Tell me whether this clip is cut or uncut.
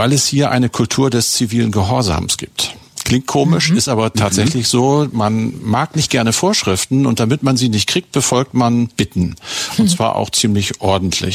uncut